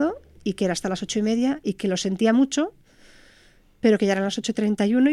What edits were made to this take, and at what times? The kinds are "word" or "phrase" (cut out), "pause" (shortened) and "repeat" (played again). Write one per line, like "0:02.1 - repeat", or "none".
none